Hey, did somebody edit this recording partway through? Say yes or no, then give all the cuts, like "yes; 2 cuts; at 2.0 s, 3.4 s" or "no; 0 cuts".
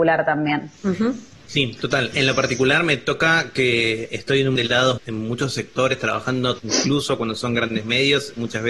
yes; 5 cuts; at 2.1 s, 4.1 s, 4.6 s, 5.0 s, 6.6 s